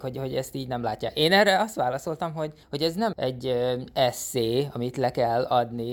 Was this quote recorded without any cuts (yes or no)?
no